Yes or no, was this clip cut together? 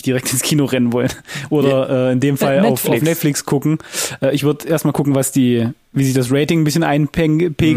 no